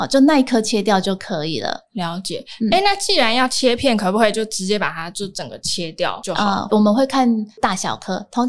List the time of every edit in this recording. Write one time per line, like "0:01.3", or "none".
0:06.7